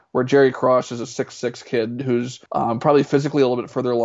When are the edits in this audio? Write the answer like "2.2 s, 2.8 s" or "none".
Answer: 2.5 s